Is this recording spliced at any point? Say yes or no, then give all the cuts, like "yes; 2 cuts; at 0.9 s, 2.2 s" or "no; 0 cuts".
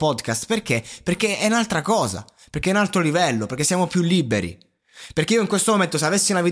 no; 0 cuts